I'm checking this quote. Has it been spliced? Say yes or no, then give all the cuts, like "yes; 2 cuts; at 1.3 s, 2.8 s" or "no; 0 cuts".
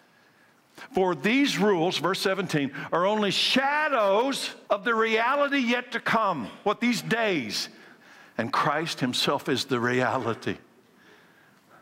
yes; 2 cuts; at 4.6 s, 8.0 s